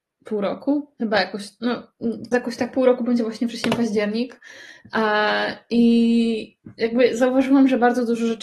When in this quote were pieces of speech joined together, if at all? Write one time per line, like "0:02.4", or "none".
0:00.9
0:02.3